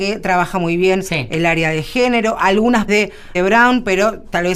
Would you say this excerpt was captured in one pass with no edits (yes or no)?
no